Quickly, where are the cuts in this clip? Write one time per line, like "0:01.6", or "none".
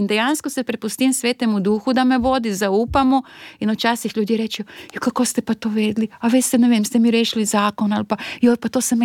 none